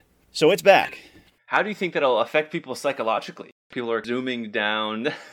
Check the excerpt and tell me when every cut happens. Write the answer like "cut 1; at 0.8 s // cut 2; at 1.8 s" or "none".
none